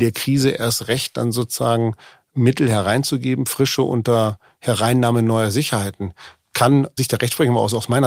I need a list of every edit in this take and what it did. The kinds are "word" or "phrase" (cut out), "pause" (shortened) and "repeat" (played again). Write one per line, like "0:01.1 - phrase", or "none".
0:07.0 - word

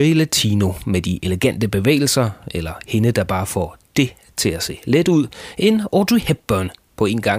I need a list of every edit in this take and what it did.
none

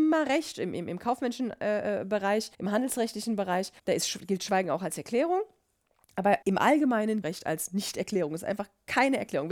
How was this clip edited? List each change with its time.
0:02.5 - pause
0:03.8 - pause
0:06.4 - pause
0:07.2 - phrase

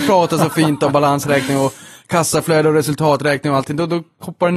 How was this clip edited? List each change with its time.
none

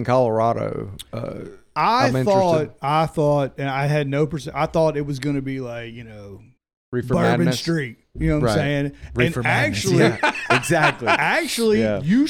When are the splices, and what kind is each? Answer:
0:06.6 - pause

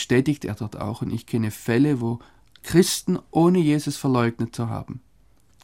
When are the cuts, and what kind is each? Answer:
none

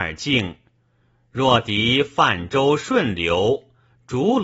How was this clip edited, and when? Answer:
none

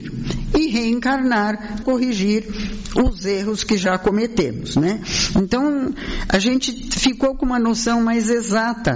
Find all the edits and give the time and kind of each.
0:01.8 - word

